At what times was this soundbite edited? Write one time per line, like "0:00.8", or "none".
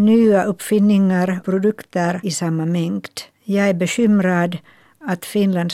0:01.4
0:02.2
0:03.3